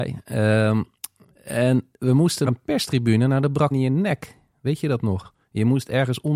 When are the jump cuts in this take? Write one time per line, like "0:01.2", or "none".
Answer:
0:02.5
0:03.7

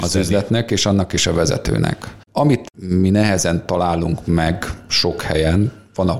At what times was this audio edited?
none

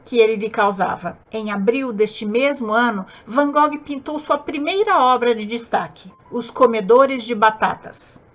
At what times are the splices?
0:01.2
0:06.2

